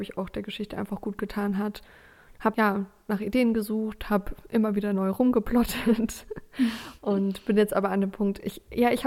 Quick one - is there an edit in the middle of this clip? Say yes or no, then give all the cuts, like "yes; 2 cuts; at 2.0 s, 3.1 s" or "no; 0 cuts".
yes; 1 cut; at 2.5 s